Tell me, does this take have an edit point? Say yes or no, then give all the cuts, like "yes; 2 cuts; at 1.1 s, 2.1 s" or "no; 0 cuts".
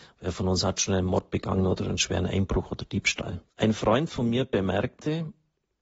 yes; 1 cut; at 3.5 s